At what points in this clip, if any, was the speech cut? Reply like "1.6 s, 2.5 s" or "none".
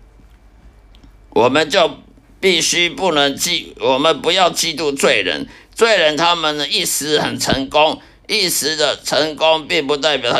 none